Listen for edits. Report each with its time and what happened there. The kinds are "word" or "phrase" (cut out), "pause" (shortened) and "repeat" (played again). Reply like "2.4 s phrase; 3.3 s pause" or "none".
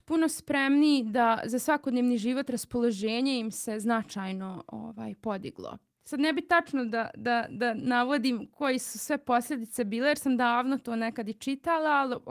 none